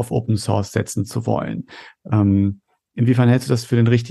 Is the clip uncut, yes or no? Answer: yes